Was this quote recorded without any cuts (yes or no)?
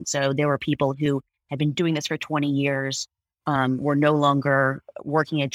yes